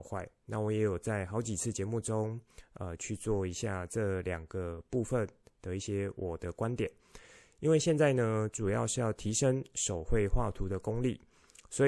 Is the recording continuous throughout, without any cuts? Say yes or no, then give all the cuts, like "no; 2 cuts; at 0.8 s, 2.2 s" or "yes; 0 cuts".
yes; 0 cuts